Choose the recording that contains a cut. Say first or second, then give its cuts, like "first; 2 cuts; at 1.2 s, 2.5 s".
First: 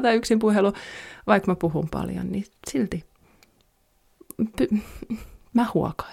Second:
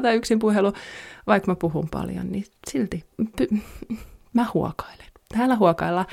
second; 1 cut; at 3.1 s